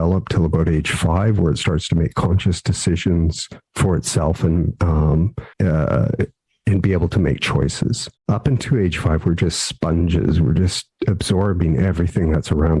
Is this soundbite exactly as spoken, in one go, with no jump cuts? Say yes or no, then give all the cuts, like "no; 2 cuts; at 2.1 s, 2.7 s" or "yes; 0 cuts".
no; 3 cuts; at 3.7 s, 5.5 s, 8.2 s